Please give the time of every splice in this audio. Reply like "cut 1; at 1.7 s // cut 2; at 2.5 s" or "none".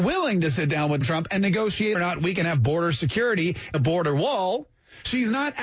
cut 1; at 1.0 s // cut 2; at 1.9 s // cut 3; at 3.7 s